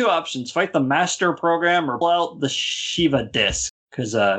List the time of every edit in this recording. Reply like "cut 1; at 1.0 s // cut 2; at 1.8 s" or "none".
cut 1; at 2.0 s